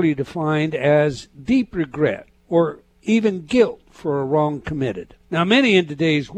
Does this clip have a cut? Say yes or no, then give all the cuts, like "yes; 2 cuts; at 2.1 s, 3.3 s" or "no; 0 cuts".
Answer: yes; 2 cuts; at 2.4 s, 5.2 s